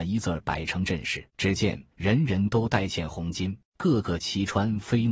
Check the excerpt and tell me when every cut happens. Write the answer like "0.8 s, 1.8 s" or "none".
1.3 s, 1.9 s, 3.7 s